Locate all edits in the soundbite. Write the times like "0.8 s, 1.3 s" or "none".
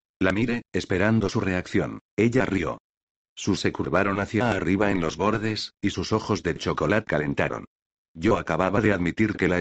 2.1 s, 3.6 s, 4.9 s, 7.1 s